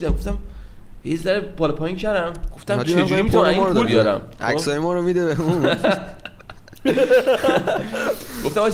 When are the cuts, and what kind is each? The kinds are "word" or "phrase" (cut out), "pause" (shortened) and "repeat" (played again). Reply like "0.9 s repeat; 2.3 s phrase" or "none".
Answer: 3.8 s word